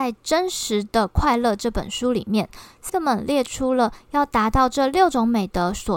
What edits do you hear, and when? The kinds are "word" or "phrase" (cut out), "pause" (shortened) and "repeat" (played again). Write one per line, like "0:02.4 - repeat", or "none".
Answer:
0:02.9 - word